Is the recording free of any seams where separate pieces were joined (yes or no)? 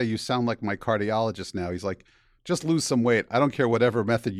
yes